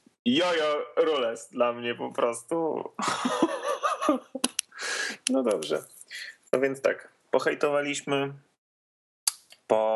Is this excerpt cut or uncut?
cut